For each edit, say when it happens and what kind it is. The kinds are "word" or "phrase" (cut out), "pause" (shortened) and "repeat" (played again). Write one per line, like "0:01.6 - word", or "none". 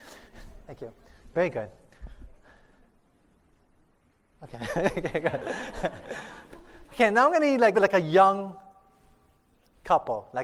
0:07.7 - word